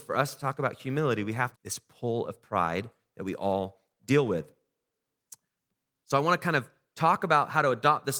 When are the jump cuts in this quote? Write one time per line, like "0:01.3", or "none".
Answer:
0:01.5